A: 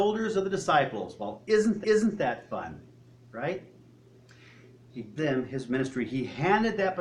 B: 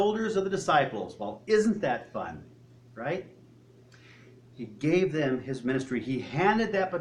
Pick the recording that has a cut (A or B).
A